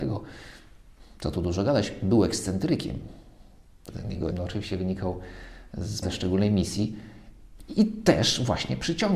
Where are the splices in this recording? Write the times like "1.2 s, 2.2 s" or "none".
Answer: 3.9 s, 4.3 s, 6.0 s